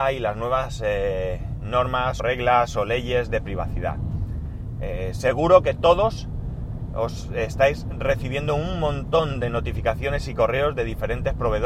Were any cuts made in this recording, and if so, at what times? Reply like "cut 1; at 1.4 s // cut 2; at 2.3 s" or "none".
cut 1; at 2.2 s